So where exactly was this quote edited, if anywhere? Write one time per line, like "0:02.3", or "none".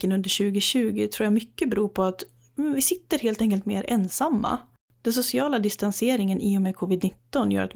none